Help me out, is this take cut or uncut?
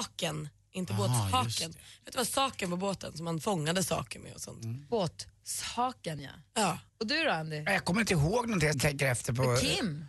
cut